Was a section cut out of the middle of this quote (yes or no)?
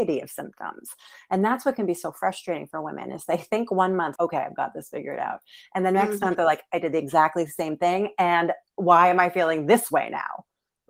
yes